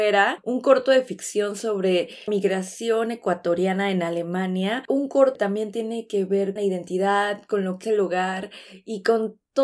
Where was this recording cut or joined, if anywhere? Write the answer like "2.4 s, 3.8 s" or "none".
2.3 s, 4.9 s, 5.3 s, 6.6 s, 7.8 s